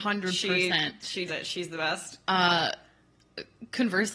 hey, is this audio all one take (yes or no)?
no